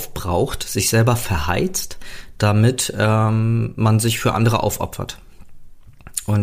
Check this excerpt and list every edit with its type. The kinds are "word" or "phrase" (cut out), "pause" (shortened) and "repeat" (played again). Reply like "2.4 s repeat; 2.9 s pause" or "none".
none